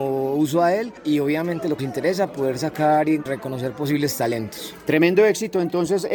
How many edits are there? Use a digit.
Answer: 1